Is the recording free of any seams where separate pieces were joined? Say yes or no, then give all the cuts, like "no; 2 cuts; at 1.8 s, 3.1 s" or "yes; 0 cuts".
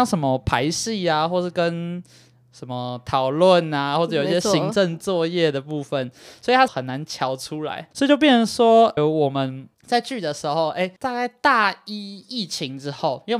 no; 5 cuts; at 6.7 s, 7.9 s, 9.0 s, 9.7 s, 11.0 s